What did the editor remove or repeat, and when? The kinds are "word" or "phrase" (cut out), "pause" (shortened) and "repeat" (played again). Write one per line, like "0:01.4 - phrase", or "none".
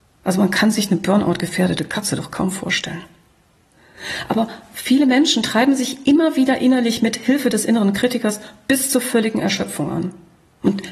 none